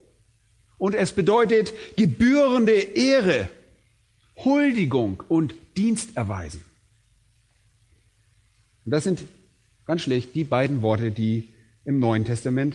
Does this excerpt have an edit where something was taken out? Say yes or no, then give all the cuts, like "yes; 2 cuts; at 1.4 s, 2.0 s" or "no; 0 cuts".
no; 0 cuts